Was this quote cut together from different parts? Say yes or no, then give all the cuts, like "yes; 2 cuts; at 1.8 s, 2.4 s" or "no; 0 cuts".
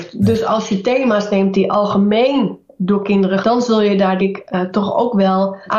yes; 2 cuts; at 3.4 s, 4.2 s